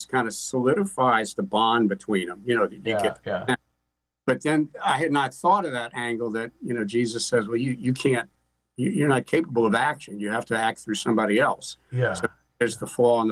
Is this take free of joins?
yes; 0 cuts

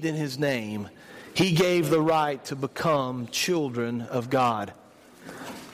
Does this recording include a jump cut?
no; 0 cuts

